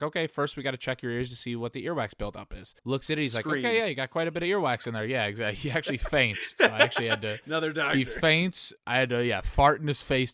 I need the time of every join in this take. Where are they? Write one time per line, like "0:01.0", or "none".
0:02.8
0:08.8